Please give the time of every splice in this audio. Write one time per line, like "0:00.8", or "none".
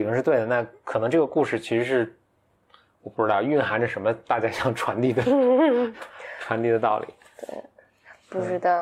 none